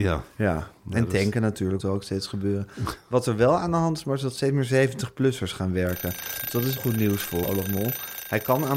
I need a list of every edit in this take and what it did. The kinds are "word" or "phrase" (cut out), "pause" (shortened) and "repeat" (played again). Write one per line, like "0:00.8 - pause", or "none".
0:01.8 - word
0:06.8 - word
0:07.4 - word